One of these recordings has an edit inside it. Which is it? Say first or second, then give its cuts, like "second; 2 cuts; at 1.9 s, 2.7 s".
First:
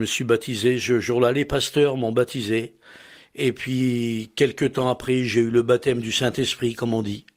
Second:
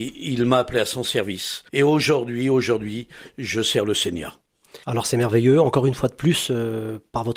second; 2 cuts; at 1.7 s, 4.8 s